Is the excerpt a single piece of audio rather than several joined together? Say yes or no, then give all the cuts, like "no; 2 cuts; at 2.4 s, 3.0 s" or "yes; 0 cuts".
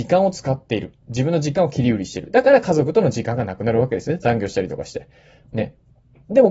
yes; 0 cuts